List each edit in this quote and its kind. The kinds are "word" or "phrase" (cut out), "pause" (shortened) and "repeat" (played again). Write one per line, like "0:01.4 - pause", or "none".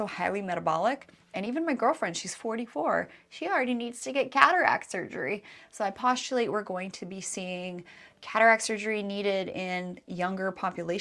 none